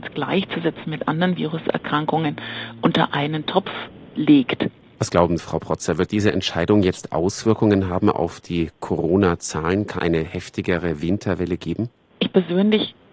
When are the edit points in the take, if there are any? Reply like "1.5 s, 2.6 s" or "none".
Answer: 5.4 s, 10.0 s